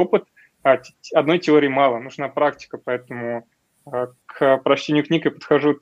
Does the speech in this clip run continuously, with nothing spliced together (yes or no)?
yes